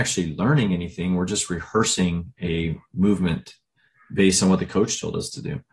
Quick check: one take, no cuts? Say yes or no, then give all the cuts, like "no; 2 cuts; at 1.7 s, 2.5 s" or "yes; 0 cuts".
yes; 0 cuts